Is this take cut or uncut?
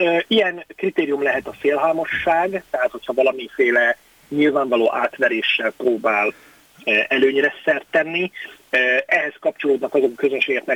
uncut